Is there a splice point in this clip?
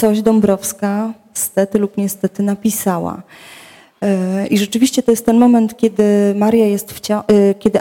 no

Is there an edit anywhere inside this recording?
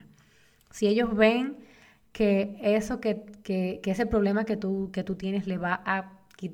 no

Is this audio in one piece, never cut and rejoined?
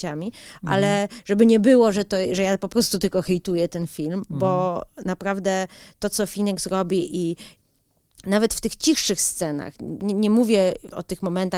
yes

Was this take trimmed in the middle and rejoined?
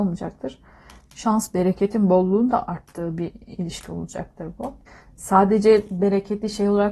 yes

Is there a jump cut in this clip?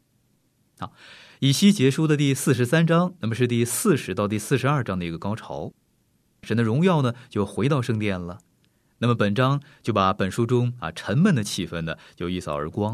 no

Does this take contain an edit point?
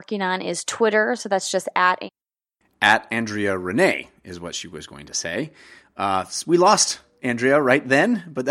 no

